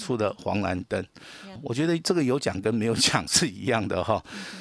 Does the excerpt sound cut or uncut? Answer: cut